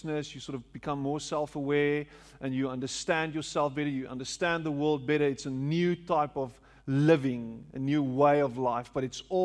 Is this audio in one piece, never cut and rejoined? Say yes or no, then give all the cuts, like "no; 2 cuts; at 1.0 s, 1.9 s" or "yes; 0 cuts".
yes; 0 cuts